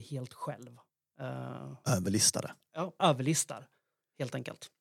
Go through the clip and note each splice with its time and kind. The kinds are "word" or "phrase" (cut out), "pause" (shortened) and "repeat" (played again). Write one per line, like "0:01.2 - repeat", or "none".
0:03.0 - word